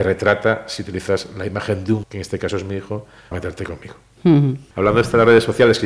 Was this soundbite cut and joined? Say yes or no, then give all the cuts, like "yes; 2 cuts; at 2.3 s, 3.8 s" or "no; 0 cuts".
yes; 2 cuts; at 2.0 s, 3.3 s